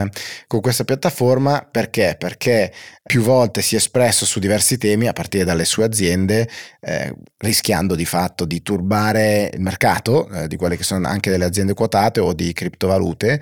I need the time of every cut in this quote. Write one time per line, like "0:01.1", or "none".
none